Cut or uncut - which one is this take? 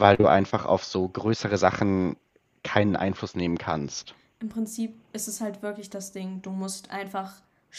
uncut